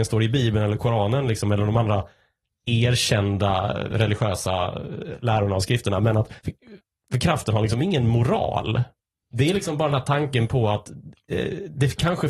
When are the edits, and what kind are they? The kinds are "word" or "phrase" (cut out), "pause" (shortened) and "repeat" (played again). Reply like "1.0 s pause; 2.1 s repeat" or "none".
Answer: 6.4 s pause; 9.0 s pause